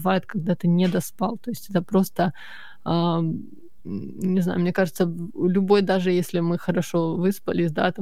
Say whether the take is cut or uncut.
uncut